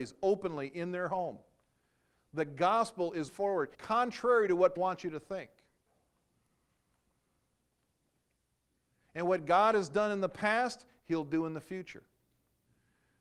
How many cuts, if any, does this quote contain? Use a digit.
3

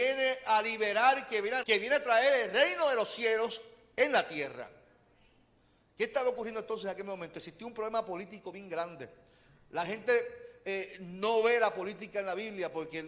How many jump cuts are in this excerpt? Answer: 1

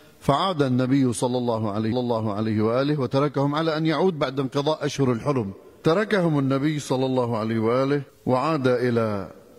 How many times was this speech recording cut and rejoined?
2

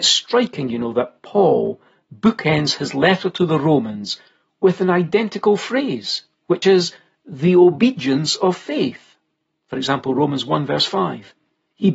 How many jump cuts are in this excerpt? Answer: 0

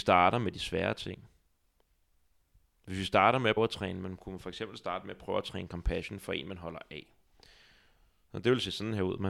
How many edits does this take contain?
1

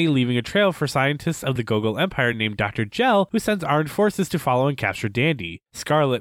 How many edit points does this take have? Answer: 0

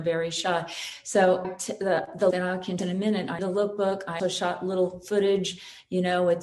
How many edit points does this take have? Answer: 5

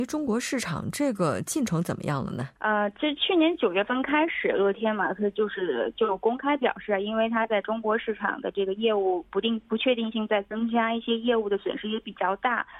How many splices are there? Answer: 1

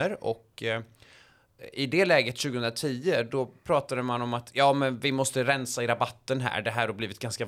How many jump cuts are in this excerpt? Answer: 0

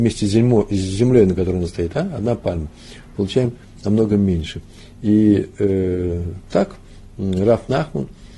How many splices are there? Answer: 0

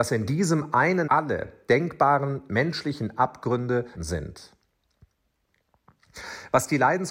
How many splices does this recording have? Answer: 2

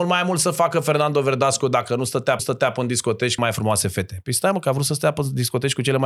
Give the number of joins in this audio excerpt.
2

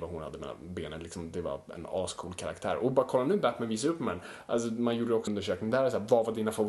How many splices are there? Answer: 1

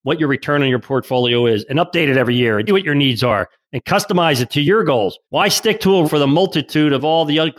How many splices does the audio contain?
3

